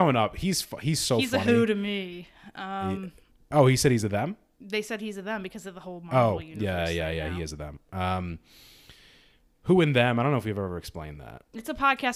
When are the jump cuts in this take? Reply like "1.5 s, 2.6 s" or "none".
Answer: none